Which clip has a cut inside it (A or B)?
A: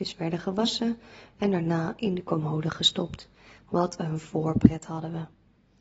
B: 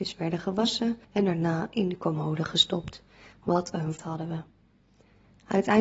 B